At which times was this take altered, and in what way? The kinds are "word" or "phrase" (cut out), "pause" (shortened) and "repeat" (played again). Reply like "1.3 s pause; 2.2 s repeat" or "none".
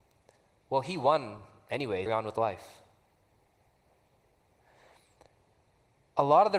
2.1 s phrase